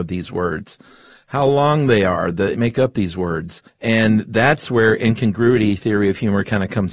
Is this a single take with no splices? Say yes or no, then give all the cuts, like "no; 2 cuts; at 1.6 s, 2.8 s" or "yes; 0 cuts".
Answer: no; 2 cuts; at 2.5 s, 3.7 s